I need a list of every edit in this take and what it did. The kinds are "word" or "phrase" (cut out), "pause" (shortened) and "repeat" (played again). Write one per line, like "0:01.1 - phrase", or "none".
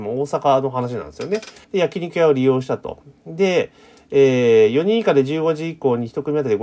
0:01.6 - pause